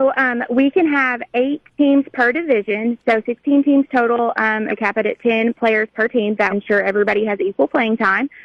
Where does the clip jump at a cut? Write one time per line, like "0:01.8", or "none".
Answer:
0:01.7
0:04.7
0:06.5